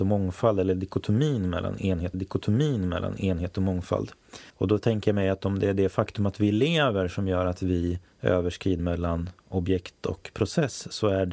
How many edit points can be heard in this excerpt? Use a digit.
3